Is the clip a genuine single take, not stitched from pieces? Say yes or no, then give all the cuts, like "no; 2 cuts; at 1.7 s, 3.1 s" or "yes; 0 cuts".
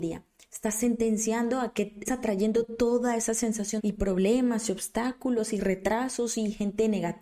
no; 2 cuts; at 2.1 s, 3.8 s